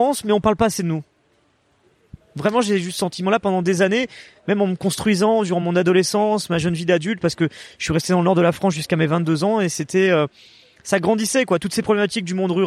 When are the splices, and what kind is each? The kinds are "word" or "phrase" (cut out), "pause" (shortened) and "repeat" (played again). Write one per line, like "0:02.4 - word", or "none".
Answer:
none